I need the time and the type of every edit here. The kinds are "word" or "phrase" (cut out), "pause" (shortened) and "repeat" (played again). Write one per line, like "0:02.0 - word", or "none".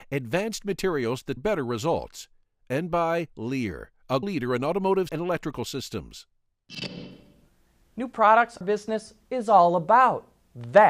0:01.4 - word
0:04.2 - word
0:05.1 - word
0:08.6 - phrase